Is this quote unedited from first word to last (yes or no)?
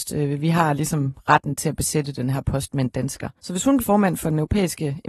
no